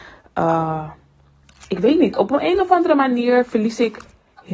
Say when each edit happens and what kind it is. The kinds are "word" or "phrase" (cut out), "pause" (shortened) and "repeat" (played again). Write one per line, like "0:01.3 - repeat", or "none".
none